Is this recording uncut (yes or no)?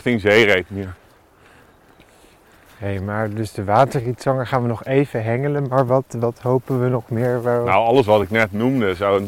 yes